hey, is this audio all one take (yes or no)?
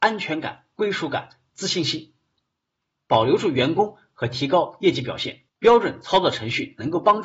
no